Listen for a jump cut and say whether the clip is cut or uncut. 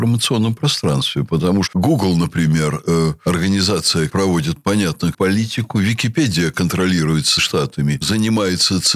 cut